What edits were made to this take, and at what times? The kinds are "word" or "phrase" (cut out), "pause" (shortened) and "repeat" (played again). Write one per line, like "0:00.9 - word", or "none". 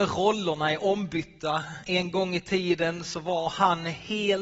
none